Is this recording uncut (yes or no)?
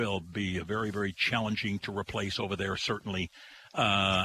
yes